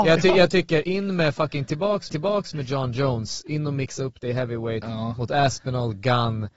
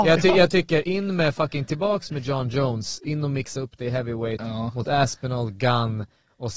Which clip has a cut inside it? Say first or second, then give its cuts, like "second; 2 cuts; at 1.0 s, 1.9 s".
first; 1 cut; at 2.1 s